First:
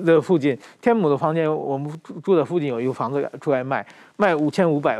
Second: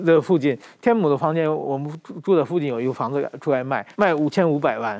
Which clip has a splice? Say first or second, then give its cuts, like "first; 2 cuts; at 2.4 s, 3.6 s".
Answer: second; 1 cut; at 3.9 s